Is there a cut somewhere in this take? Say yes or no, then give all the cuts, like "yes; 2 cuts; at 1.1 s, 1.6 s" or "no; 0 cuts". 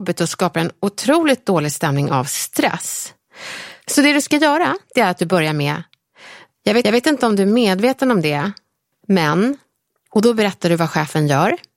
yes; 1 cut; at 6.8 s